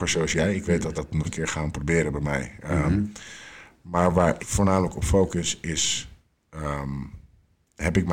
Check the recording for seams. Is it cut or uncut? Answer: cut